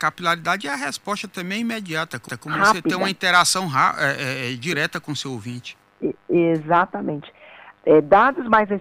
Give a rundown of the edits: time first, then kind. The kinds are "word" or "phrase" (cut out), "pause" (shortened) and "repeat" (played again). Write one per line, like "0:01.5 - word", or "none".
0:02.3 - repeat